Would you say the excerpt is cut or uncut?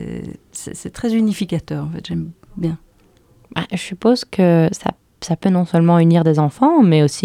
uncut